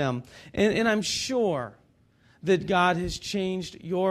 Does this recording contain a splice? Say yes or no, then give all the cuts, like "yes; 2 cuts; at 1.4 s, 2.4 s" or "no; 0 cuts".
no; 0 cuts